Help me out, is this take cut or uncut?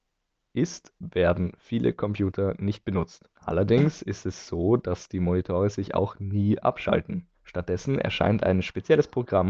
cut